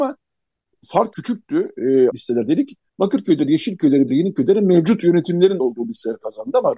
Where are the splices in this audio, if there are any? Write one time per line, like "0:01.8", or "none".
0:01.1
0:02.1
0:02.9
0:04.1
0:05.6